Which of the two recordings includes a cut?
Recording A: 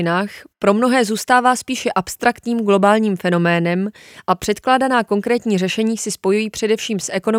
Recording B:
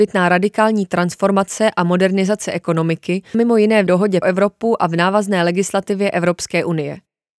B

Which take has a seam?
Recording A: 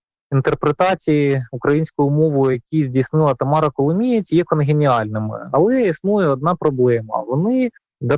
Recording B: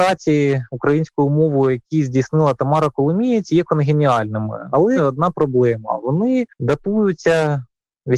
B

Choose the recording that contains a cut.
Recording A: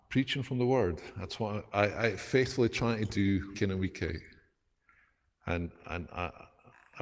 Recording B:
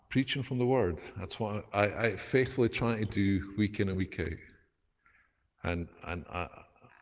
A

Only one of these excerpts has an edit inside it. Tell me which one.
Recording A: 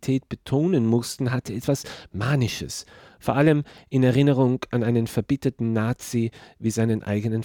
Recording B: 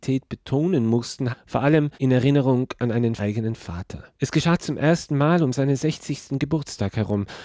B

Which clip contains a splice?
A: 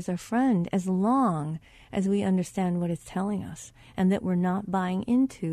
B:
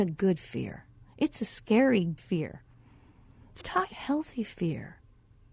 B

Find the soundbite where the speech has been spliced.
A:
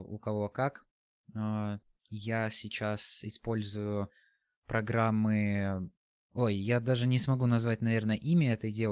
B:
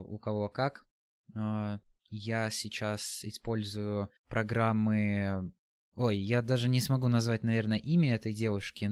B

